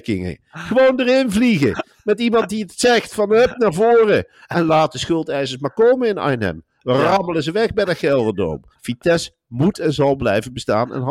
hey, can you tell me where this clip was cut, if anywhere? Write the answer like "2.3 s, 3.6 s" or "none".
8.7 s